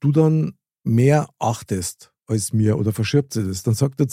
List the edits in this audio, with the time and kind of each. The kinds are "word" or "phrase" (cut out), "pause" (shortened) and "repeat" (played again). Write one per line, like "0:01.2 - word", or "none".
0:02.2 - pause

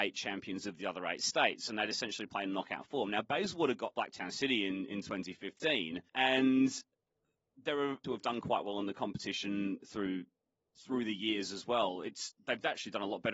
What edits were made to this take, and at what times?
0:03.9 - phrase
0:06.1 - pause
0:08.0 - phrase
0:09.8 - word

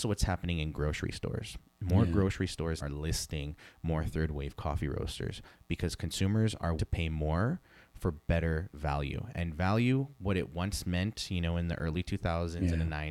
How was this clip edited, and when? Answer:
0:02.8 - word
0:06.8 - word

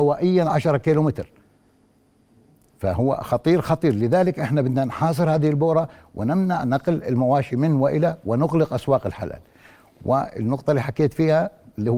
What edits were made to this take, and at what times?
none

